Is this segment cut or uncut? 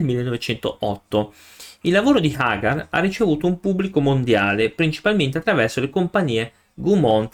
uncut